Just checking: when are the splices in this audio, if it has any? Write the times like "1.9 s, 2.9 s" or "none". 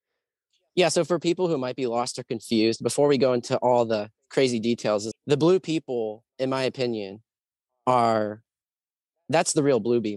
5.1 s, 6.3 s